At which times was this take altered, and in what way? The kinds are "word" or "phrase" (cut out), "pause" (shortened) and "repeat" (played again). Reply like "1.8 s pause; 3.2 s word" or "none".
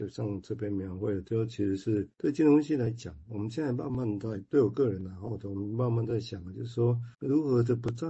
2.1 s pause; 7.1 s pause

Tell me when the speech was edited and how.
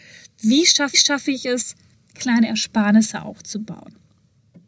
0.9 s repeat; 2.1 s word

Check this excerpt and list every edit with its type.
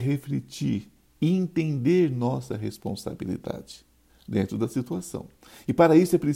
none

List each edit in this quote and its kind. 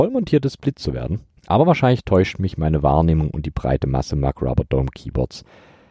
1.4 s pause

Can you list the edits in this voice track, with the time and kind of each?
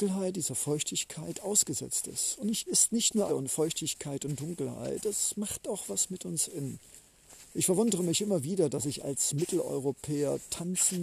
2.7 s phrase; 3.3 s phrase

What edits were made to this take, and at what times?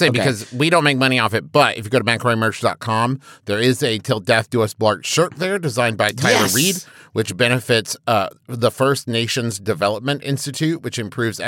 none

